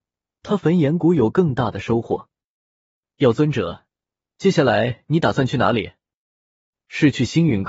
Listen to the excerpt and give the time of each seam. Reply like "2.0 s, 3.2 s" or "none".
none